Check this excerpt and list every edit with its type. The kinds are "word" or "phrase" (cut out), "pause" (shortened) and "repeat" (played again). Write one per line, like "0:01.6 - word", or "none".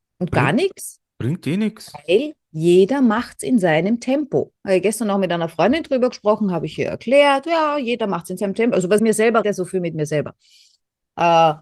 0:09.0 - phrase
0:09.4 - phrase